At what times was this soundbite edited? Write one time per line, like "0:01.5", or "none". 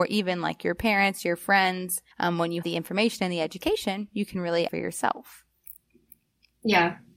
0:02.1
0:02.6
0:04.7